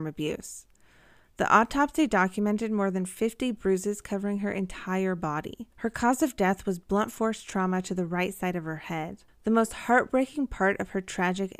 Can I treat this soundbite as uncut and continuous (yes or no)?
no